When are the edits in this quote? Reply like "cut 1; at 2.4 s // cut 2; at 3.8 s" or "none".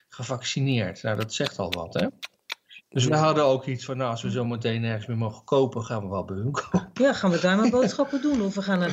none